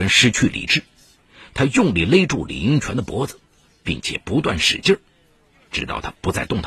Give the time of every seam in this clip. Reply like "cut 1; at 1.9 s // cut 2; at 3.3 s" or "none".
none